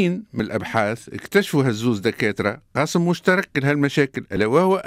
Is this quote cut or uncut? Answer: uncut